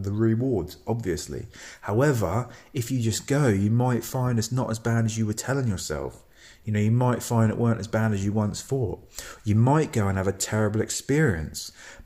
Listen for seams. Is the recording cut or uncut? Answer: uncut